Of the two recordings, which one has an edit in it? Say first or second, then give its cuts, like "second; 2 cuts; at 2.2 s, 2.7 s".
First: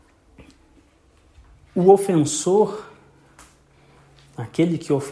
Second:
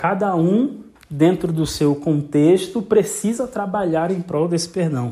second; 1 cut; at 1.0 s